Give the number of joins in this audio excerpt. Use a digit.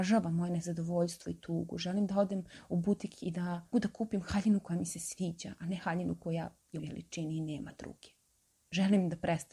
2